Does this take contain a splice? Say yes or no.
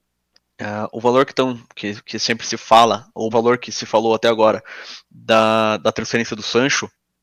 yes